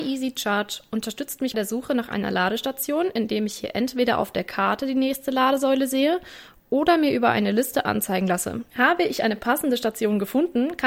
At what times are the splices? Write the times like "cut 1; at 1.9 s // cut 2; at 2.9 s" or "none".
cut 1; at 1.5 s // cut 2; at 8.7 s